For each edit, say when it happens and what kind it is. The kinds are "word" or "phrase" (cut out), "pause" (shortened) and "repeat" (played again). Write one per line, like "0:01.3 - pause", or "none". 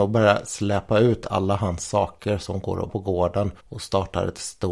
0:02.9 - word
0:03.6 - pause